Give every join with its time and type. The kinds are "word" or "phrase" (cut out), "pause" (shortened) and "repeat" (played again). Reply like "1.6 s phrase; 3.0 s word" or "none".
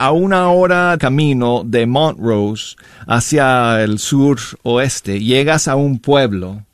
1.0 s word